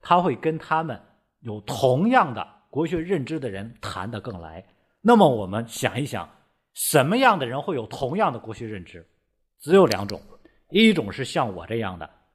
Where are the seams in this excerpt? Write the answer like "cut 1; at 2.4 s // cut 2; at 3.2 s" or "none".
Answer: none